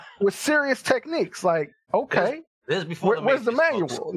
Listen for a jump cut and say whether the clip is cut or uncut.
uncut